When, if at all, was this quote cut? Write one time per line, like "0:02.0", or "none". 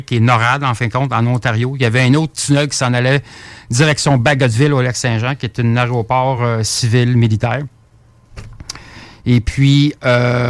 none